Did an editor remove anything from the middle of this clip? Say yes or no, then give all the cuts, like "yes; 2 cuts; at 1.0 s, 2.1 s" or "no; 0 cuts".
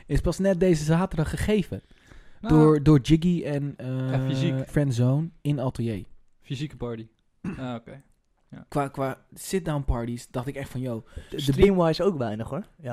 yes; 3 cuts; at 4.7 s, 8.7 s, 11.3 s